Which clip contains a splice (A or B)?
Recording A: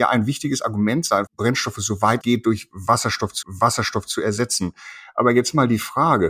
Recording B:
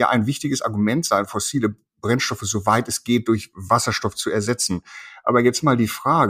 A